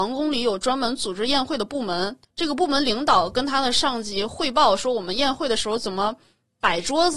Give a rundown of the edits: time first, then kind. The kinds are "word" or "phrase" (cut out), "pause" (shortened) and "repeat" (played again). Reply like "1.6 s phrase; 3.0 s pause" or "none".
2.2 s pause